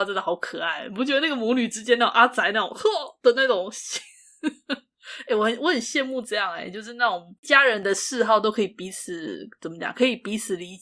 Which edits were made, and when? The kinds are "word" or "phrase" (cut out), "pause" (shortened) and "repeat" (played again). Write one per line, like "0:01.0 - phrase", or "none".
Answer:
0:07.4 - pause